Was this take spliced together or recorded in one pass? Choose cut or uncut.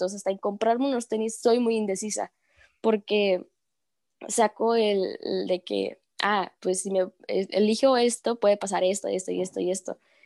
uncut